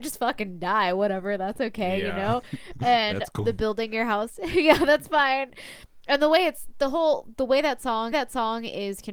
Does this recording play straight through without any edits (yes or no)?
no